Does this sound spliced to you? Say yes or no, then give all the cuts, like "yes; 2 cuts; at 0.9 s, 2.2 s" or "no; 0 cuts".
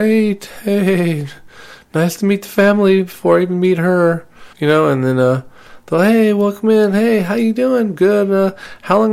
yes; 1 cut; at 4.5 s